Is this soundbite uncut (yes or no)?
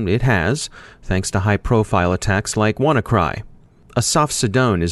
yes